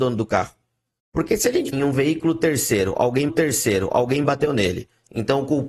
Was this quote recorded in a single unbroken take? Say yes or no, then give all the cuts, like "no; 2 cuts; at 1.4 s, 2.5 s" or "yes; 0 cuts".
no; 2 cuts; at 1.7 s, 3.3 s